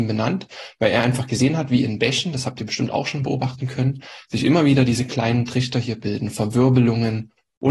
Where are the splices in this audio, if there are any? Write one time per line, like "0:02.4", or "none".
none

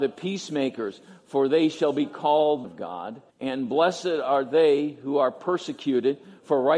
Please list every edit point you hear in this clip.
0:02.6
0:03.3

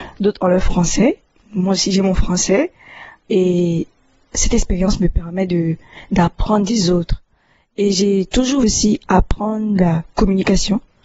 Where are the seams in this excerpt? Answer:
0:08.6

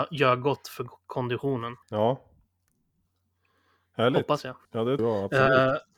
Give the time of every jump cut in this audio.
0:01.8
0:04.6
0:05.0

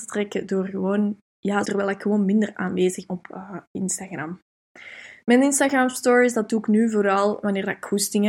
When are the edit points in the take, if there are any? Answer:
0:01.6
0:03.1

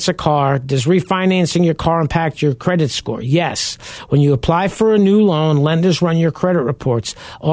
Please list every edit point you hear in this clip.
none

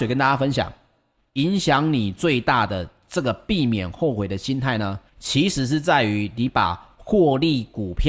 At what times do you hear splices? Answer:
0:05.1

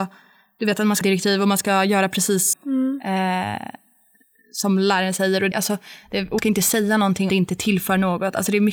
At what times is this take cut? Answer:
0:01.0
0:02.5
0:05.5
0:06.4
0:07.3

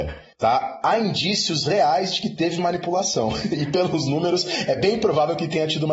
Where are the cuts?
none

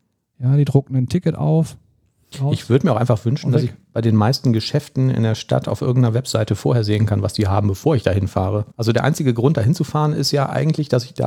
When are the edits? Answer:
0:08.7

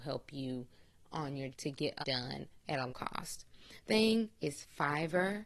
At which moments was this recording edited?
0:01.5
0:02.0
0:02.9
0:03.9

